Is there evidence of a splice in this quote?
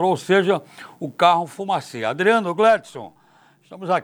no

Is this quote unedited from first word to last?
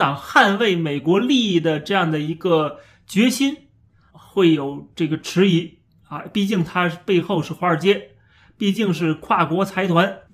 no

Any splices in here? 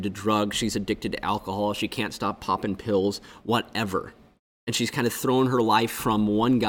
no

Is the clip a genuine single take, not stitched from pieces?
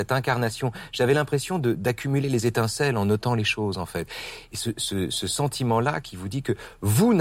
yes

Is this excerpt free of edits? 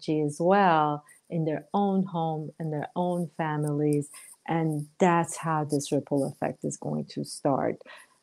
yes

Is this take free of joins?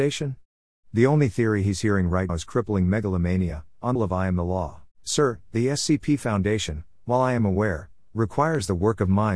no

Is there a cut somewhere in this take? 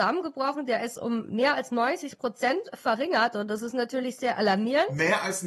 no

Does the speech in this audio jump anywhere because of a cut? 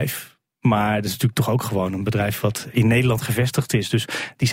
no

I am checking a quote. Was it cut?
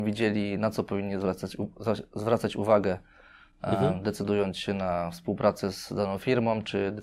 no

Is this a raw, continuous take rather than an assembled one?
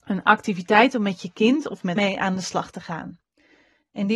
no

